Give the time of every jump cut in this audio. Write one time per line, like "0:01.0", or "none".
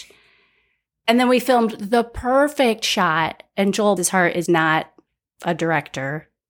0:04.0
0:04.5